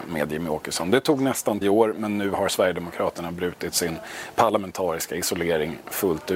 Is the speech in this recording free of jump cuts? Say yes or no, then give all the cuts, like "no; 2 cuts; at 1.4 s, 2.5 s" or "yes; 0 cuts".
no; 1 cut; at 1.6 s